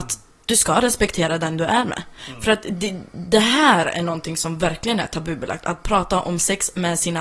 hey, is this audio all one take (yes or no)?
yes